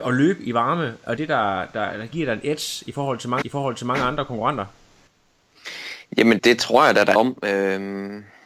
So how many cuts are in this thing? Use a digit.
4